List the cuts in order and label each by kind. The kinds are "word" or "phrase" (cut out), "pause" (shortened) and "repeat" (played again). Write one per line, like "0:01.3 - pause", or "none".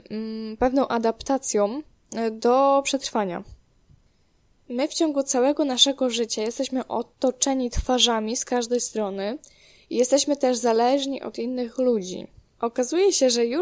none